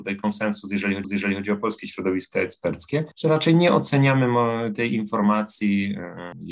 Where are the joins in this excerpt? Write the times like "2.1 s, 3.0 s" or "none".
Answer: 1.0 s